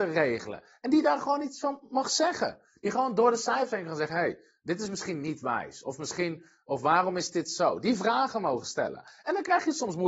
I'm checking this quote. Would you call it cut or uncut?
uncut